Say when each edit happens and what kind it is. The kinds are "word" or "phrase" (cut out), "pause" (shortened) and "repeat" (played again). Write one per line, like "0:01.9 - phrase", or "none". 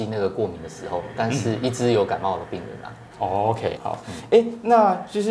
0:03.8 - word